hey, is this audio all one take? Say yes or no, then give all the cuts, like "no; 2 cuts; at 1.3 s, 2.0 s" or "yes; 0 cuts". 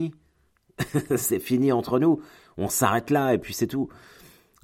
yes; 0 cuts